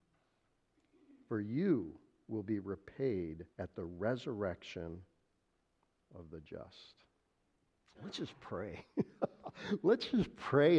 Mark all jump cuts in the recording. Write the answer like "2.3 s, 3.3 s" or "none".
3.5 s, 7.3 s